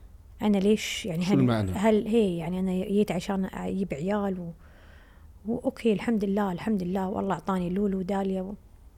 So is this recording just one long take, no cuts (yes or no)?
yes